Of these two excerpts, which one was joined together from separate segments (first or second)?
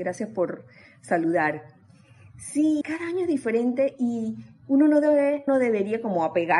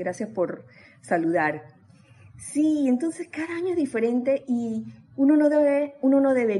first